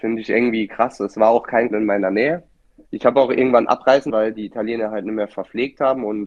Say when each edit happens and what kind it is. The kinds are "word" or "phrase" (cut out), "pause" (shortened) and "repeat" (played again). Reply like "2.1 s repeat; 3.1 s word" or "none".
1.7 s word; 2.6 s pause; 4.1 s word

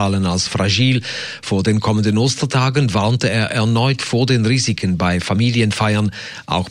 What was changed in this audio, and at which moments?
none

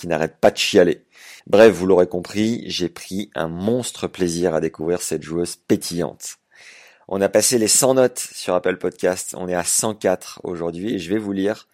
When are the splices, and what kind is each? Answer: 1.4 s pause

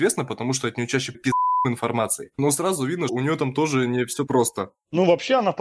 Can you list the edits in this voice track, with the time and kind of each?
1.1 s word; 3.1 s word; 4.3 s word

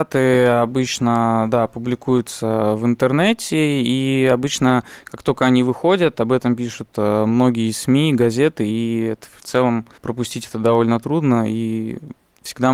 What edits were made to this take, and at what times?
10.0 s pause

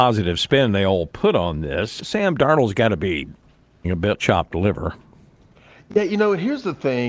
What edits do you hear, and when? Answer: 2.0 s word; 3.8 s word; 4.2 s word

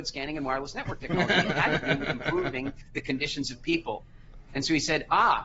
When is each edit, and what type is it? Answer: none

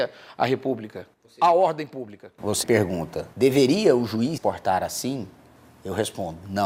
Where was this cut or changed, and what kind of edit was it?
1.2 s pause; 2.6 s word; 3.3 s pause; 4.4 s word

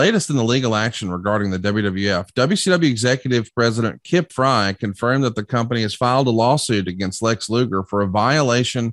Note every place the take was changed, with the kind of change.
none

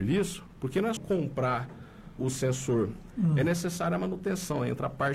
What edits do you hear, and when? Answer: 1.0 s word; 2.2 s word

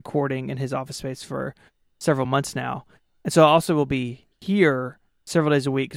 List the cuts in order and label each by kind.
none

